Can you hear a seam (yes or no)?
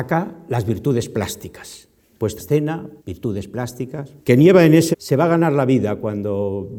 yes